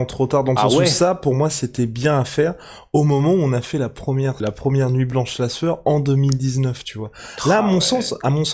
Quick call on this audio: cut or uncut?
cut